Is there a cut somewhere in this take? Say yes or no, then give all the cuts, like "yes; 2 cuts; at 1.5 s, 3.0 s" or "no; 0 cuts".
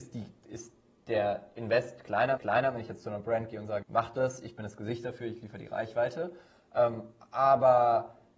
yes; 2 cuts; at 2.4 s, 3.8 s